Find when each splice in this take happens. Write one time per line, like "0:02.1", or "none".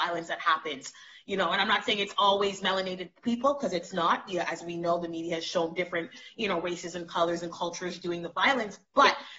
none